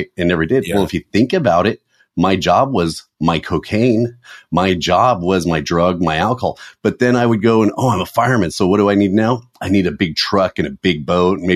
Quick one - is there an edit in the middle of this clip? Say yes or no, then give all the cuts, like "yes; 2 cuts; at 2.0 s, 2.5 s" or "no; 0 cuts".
no; 0 cuts